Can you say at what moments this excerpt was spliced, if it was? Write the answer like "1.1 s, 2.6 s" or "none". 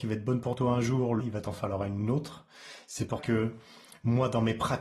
1.2 s, 3.2 s